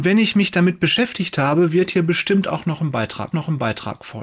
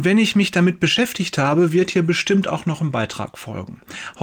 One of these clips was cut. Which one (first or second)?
first